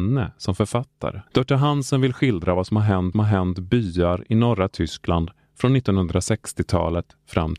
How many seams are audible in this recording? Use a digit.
2